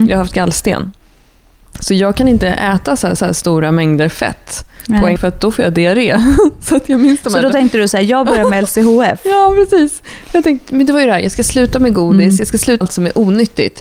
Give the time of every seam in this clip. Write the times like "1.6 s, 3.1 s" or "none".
3.2 s, 5.2 s, 12.8 s